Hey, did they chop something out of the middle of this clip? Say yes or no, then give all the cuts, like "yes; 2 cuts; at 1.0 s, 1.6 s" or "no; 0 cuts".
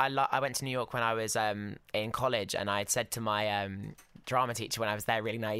no; 0 cuts